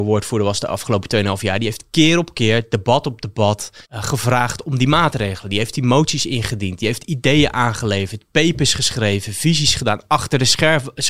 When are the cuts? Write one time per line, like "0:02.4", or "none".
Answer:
0:03.8

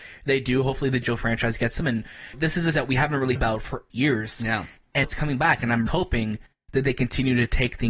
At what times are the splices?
0:01.0
0:01.8
0:02.3
0:02.7
0:03.4
0:03.9
0:05.0
0:05.9

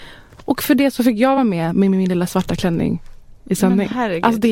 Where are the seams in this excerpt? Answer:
none

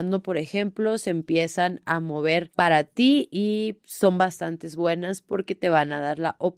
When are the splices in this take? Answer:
none

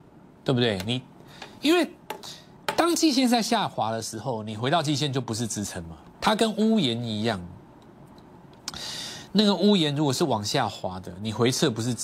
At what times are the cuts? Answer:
0:06.1

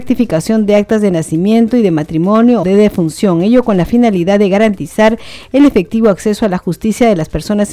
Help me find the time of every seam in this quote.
0:02.6

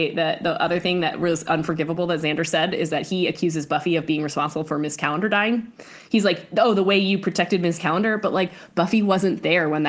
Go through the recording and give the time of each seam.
none

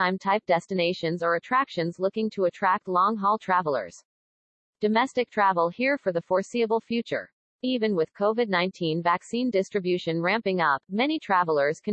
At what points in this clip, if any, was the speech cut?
none

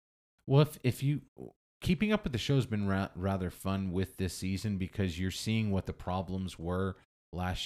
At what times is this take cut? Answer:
none

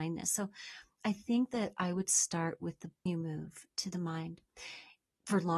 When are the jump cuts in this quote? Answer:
0:03.1

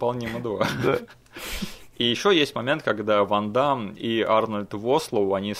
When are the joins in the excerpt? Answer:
none

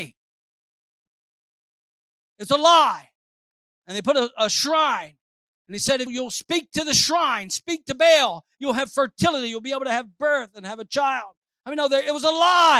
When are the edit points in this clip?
0:06.1

